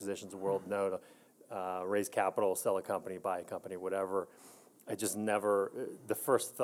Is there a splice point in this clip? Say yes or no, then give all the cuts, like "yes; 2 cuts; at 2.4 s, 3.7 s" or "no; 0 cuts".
no; 0 cuts